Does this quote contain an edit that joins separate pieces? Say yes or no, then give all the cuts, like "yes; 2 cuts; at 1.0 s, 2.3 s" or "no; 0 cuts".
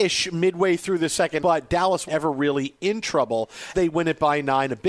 yes; 3 cuts; at 1.4 s, 2.1 s, 3.7 s